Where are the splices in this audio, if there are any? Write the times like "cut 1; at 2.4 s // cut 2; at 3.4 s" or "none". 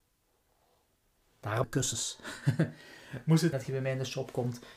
cut 1; at 1.6 s // cut 2; at 3.5 s

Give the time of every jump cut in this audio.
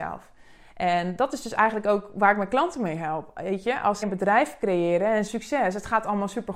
cut 1; at 4.0 s // cut 2; at 5.3 s

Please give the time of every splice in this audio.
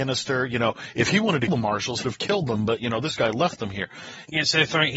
cut 1; at 1.5 s // cut 2; at 2.0 s

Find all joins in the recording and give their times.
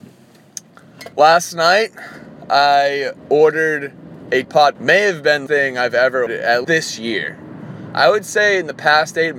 cut 1; at 1.1 s // cut 2; at 3.2 s // cut 3; at 4.4 s // cut 4; at 4.7 s // cut 5; at 5.5 s // cut 6; at 6.3 s // cut 7; at 6.6 s

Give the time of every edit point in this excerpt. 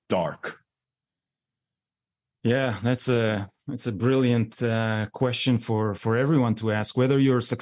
none

